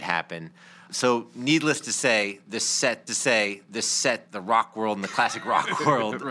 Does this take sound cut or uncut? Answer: cut